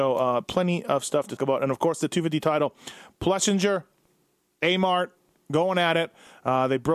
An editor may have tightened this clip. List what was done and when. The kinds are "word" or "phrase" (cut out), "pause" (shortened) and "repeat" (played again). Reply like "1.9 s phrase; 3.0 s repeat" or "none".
1.4 s word